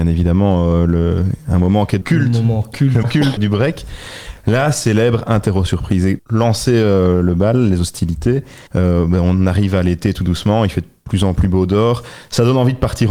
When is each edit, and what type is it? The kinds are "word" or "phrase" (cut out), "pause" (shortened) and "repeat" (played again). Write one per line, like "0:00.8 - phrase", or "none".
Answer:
0:02.0 - phrase
0:03.0 - word
0:03.4 - word
0:06.2 - word
0:08.7 - pause